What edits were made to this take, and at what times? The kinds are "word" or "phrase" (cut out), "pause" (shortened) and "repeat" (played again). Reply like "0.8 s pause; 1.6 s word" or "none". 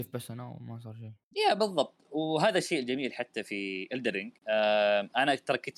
4.4 s pause